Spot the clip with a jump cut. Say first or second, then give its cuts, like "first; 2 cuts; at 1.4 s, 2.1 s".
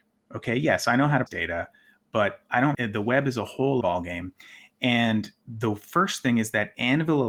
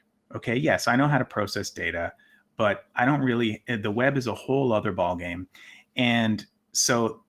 first; 4 cuts; at 1.3 s, 2.7 s, 3.8 s, 5.4 s